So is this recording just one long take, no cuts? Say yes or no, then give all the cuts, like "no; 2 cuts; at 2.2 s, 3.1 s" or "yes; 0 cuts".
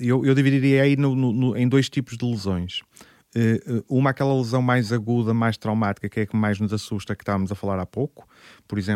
yes; 0 cuts